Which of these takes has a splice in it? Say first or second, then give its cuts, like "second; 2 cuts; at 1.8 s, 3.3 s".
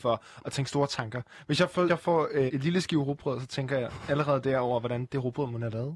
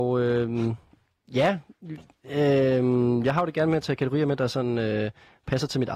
first; 2 cuts; at 1.9 s, 2.5 s